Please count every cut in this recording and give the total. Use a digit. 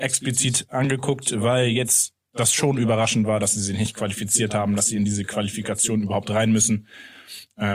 0